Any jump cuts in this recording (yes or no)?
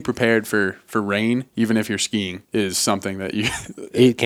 yes